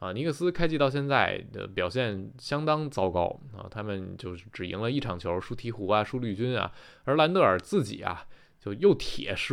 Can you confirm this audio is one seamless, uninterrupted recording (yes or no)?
yes